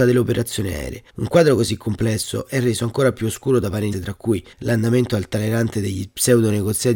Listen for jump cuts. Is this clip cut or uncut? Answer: cut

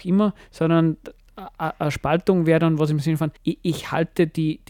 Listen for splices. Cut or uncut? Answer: cut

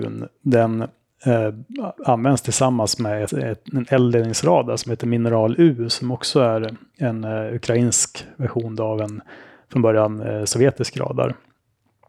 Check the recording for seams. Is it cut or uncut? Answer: cut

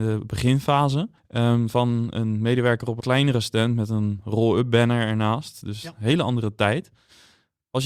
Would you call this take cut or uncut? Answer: cut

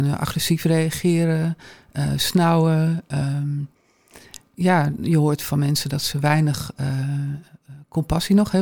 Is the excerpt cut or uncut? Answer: uncut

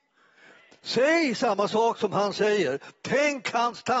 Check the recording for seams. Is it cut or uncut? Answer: uncut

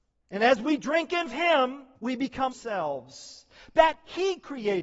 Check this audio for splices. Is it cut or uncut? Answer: cut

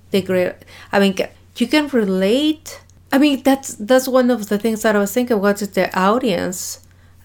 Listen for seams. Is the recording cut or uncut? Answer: uncut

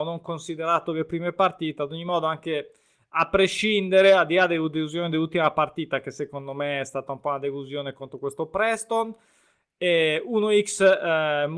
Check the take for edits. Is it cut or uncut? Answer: uncut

